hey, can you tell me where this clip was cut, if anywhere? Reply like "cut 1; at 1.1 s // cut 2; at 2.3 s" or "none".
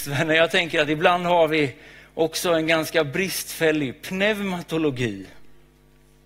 none